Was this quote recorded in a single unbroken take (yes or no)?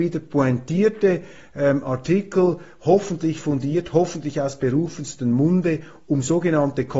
yes